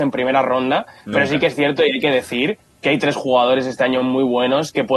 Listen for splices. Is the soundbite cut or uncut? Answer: uncut